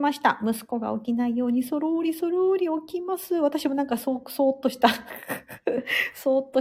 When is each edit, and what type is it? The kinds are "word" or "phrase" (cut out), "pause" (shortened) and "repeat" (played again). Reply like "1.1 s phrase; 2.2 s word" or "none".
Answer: none